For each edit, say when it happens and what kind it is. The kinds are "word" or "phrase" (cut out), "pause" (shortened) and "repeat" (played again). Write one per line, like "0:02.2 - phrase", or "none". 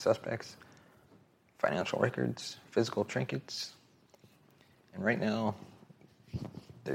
none